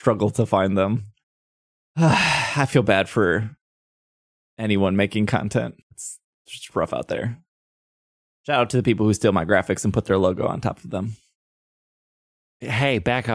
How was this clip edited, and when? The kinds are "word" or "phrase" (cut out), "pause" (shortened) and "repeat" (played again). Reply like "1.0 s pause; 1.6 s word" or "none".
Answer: 5.8 s pause